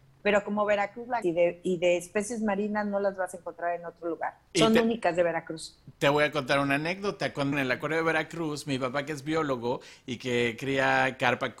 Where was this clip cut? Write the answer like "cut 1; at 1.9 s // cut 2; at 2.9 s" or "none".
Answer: cut 1; at 1.2 s // cut 2; at 4.5 s // cut 3; at 7.5 s